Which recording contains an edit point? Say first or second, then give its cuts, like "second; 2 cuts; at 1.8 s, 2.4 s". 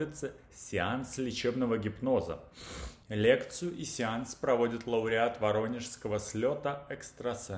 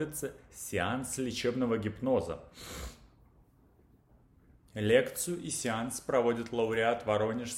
first; 1 cut; at 3.0 s